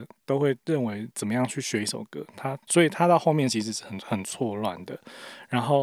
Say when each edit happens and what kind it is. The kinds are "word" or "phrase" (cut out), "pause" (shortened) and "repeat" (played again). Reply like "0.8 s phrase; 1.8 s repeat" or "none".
2.6 s pause